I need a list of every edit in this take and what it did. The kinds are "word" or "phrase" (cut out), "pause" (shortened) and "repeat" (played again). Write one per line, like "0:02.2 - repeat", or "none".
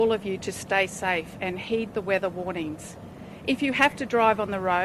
none